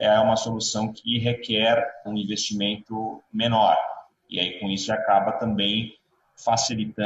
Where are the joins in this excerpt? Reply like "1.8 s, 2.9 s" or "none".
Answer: 2.0 s, 4.9 s